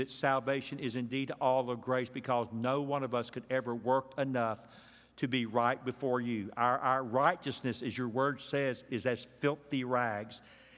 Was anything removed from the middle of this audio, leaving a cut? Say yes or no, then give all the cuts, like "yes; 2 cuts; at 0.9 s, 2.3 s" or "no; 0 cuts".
no; 0 cuts